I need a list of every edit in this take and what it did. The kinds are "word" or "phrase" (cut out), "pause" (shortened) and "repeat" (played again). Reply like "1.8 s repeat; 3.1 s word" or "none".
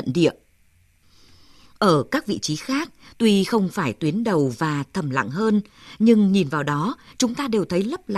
none